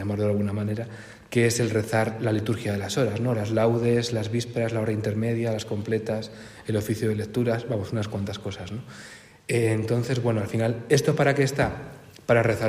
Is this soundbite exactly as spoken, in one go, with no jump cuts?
yes; 0 cuts

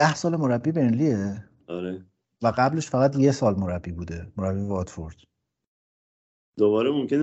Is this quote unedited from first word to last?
yes; 0 cuts

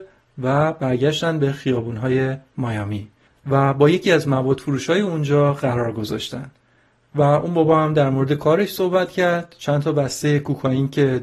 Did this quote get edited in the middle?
no; 0 cuts

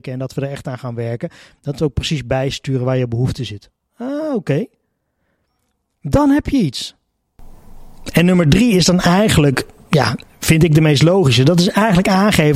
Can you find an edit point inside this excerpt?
no; 0 cuts

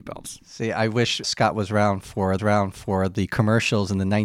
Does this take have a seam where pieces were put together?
yes; 2 cuts; at 1.2 s, 2.4 s

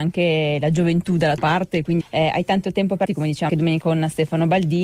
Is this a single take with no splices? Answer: no; 5 cuts; at 1.4 s, 2.0 s, 3.1 s, 3.5 s, 3.8 s

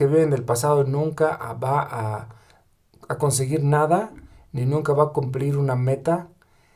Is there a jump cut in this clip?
no; 0 cuts

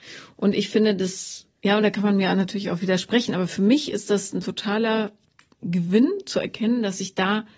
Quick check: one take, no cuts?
no; 1 cut; at 1.5 s

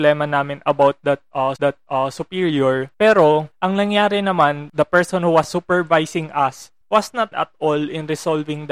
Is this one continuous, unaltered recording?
no; 3 cuts; at 1.6 s, 6.8 s, 7.3 s

